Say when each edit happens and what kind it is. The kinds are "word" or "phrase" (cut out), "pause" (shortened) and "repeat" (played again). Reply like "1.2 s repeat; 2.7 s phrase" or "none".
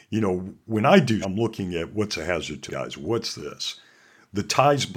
1.2 s word; 2.7 s word